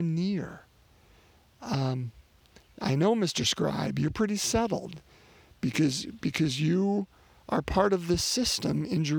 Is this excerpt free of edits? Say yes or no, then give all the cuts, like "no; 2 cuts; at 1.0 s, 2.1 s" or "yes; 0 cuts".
yes; 0 cuts